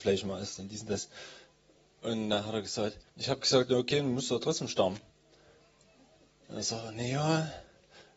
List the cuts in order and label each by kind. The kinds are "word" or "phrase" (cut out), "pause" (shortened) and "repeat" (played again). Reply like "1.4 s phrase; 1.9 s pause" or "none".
3.1 s pause